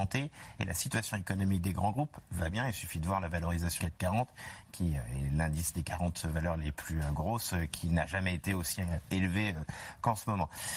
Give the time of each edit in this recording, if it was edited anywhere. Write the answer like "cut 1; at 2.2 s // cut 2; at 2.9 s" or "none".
cut 1; at 2.5 s // cut 2; at 3.8 s